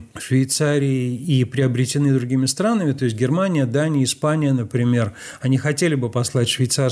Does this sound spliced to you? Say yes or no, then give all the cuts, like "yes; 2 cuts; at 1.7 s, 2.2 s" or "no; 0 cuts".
no; 0 cuts